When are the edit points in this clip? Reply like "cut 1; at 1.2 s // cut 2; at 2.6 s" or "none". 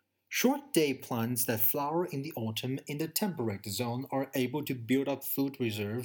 none

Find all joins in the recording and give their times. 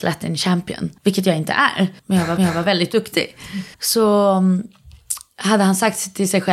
cut 1; at 1.0 s // cut 2; at 2.0 s // cut 3; at 2.4 s // cut 4; at 3.7 s

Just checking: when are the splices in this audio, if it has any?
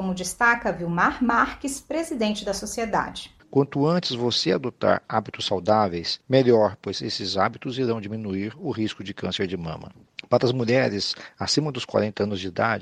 none

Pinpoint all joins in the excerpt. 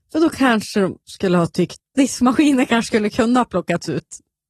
cut 1; at 1.0 s // cut 2; at 1.8 s

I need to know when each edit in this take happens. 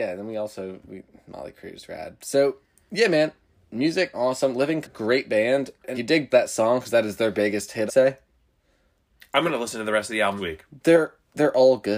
cut 1; at 4.1 s // cut 2; at 4.8 s // cut 3; at 5.9 s // cut 4; at 6.3 s // cut 5; at 7.9 s // cut 6; at 10.4 s

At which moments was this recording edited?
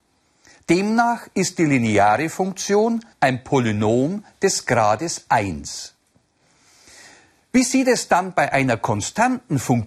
cut 1; at 3.1 s

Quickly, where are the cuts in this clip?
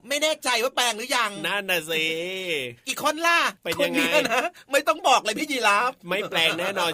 cut 1; at 3.6 s

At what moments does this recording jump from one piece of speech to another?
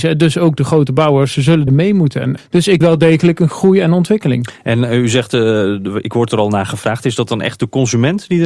cut 1; at 1.7 s // cut 2; at 2.4 s // cut 3; at 2.8 s

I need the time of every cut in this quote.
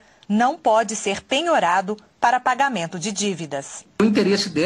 none

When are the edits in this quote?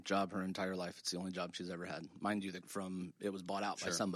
cut 1; at 2.6 s

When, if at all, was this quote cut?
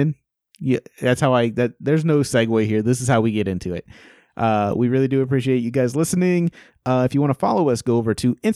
none

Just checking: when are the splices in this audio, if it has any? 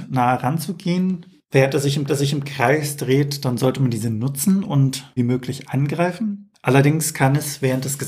cut 1; at 2.1 s // cut 2; at 5.2 s

